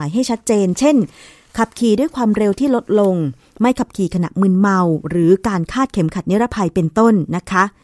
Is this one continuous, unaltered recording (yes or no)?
yes